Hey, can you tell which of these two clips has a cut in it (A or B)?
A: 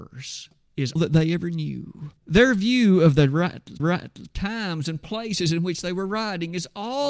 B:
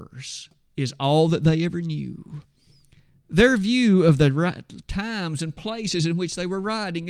A